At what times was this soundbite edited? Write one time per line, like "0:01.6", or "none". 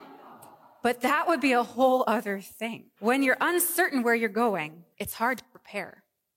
0:03.0
0:04.9